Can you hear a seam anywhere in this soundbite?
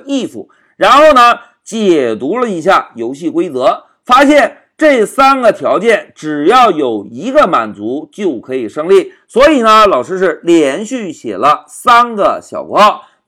no; 0 cuts

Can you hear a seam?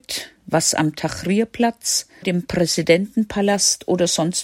yes; 1 cut; at 2.2 s

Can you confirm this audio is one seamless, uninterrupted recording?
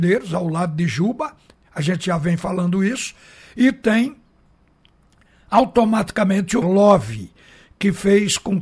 no; 1 cut; at 6.6 s

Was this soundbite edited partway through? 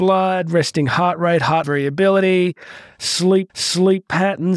yes; 2 cuts; at 1.6 s, 3.5 s

